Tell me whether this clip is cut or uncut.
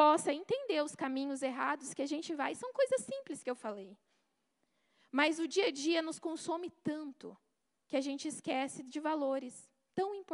uncut